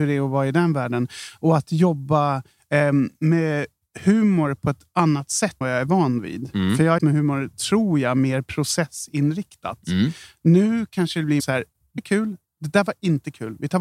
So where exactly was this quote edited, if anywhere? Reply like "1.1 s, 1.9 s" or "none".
5.6 s, 7.0 s, 11.4 s, 12.0 s